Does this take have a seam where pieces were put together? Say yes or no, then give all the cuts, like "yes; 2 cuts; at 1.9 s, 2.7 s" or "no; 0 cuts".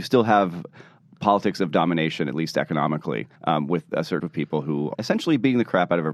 yes; 3 cuts; at 3.4 s, 4.2 s, 4.9 s